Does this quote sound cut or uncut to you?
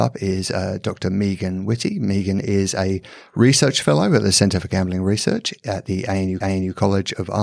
cut